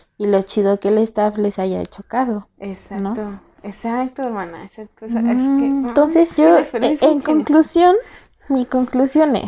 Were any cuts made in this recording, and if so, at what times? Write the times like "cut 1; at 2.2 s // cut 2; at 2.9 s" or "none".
cut 1; at 6.4 s